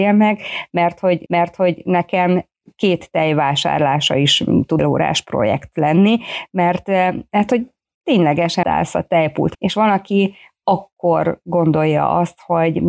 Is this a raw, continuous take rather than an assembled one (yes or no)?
no